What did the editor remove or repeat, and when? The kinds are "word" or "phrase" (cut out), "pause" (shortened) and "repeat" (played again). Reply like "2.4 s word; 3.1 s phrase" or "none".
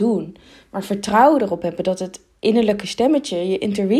none